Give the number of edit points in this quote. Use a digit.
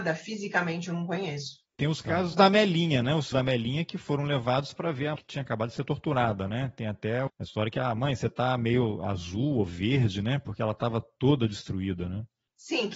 3